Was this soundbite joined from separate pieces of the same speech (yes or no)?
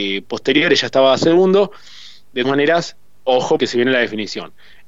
yes